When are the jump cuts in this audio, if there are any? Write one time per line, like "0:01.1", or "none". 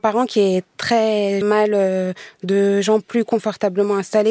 0:01.4